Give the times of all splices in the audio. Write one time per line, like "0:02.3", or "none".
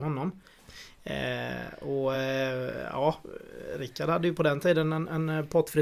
none